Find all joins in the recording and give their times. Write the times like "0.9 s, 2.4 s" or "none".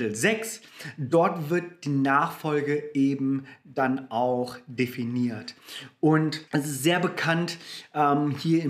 6.5 s